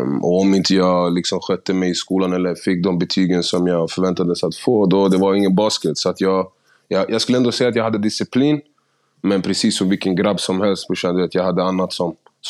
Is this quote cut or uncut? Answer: uncut